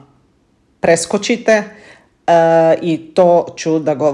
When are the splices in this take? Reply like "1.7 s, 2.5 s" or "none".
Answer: none